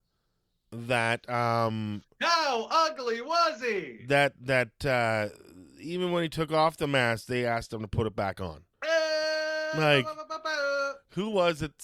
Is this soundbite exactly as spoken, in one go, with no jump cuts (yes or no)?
no